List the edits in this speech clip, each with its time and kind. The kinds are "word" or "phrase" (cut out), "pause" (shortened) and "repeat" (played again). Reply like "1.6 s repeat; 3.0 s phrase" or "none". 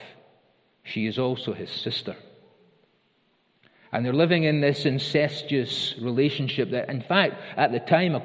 none